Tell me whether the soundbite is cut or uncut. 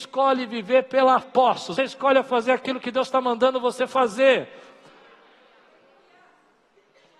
cut